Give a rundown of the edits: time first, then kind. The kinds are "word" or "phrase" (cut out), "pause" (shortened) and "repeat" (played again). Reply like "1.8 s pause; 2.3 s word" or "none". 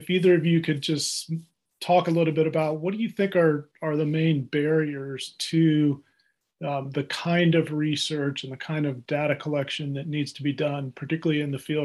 none